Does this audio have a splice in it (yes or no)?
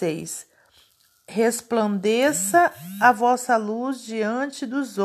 no